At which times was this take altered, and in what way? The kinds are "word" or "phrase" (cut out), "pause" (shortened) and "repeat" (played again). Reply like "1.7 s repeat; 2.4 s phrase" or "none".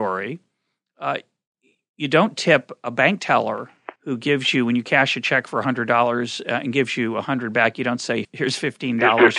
4.0 s pause; 8.2 s word